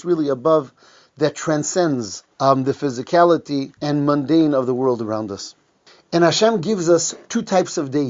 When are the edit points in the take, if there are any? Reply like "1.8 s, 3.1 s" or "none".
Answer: 2.3 s, 3.8 s, 5.9 s